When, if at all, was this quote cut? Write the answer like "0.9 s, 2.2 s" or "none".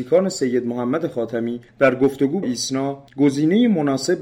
1.7 s, 2.4 s, 3.1 s

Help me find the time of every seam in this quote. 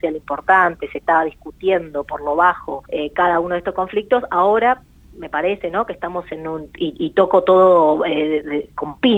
2.9 s

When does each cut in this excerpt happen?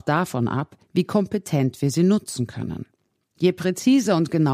none

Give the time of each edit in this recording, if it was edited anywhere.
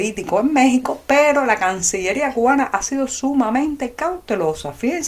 none

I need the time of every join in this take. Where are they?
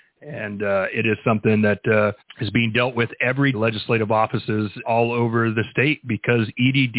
2.2 s, 3.5 s, 4.8 s

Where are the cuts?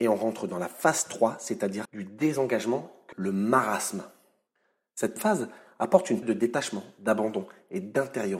1.8 s, 3.1 s, 5.2 s, 6.2 s

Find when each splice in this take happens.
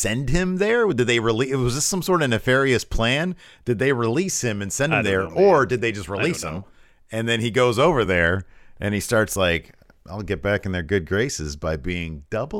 none

